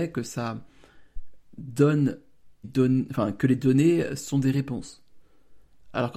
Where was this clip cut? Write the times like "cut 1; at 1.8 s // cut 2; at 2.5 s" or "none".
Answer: cut 1; at 2.6 s